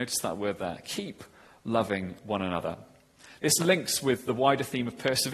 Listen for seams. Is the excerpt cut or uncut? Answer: uncut